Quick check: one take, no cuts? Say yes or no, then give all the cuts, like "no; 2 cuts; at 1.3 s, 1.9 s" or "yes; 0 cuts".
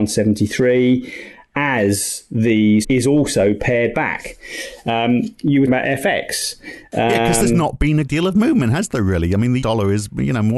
no; 4 cuts; at 2.8 s, 5.7 s, 8.1 s, 9.6 s